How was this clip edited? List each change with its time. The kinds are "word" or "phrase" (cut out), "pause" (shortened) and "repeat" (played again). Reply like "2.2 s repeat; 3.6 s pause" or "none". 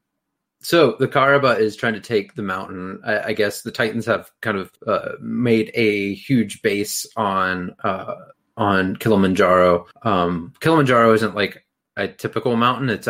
4.8 s pause; 8.3 s pause; 9.9 s pause